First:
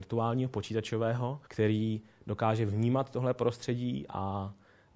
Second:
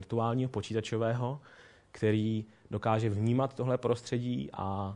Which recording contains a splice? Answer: first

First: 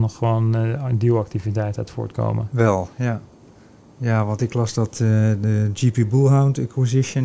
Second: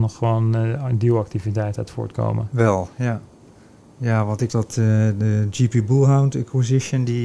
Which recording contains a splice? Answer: second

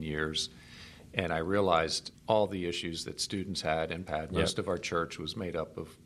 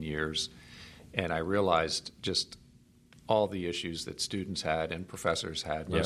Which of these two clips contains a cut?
first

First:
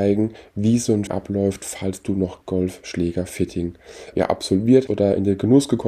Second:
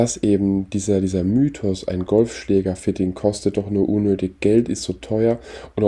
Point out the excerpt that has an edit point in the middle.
first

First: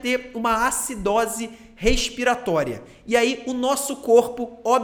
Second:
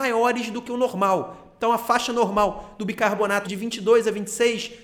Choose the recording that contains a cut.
second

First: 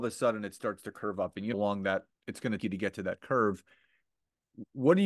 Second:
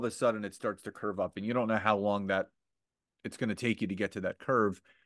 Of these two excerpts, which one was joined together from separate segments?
first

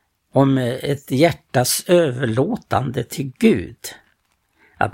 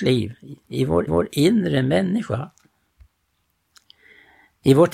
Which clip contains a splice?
second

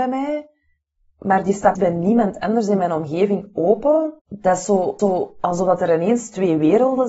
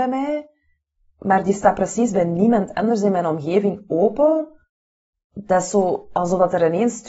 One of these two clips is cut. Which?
first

